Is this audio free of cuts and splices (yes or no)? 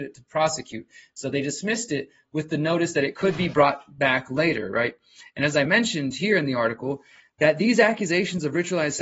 yes